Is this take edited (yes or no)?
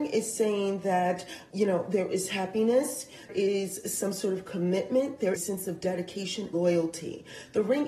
yes